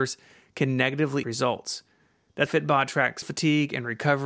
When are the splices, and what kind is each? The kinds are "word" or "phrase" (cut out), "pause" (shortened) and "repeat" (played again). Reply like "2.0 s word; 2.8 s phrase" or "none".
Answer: 1.2 s word; 2.5 s word; 3.2 s word